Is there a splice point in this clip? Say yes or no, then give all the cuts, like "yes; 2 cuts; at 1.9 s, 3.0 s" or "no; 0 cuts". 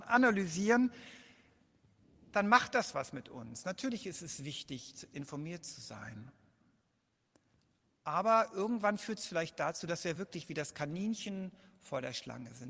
no; 0 cuts